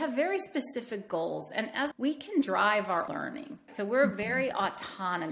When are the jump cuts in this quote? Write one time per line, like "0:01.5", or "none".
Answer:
0:01.9
0:03.1
0:03.7